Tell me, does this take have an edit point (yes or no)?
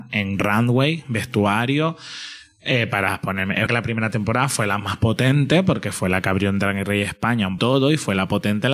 yes